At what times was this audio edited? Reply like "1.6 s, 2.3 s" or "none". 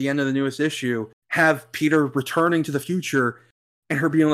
1.1 s

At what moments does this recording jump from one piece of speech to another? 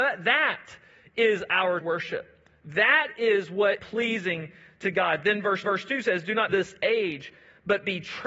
1.8 s, 3.8 s, 5.6 s, 6.5 s

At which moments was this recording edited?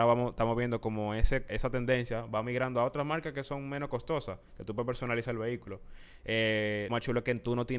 1.5 s, 6.9 s

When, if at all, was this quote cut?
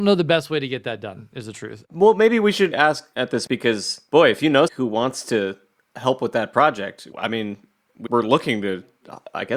2.7 s, 3.5 s, 4.7 s, 7.1 s, 8.1 s

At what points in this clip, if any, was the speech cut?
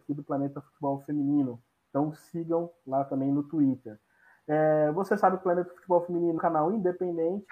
6.4 s

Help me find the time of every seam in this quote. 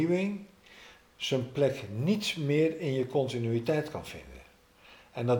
none

